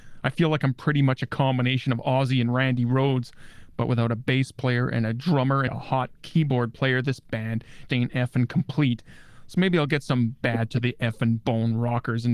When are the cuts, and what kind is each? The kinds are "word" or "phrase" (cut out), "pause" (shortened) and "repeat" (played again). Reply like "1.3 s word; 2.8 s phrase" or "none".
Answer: 5.7 s word; 7.9 s word